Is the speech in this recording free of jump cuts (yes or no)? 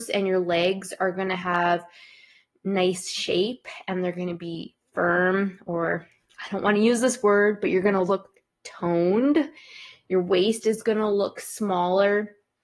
yes